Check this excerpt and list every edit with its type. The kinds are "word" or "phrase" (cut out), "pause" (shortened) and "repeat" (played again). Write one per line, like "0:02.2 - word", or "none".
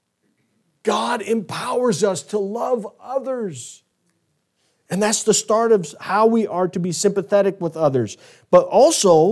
none